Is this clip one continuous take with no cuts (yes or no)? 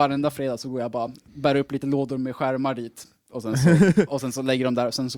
yes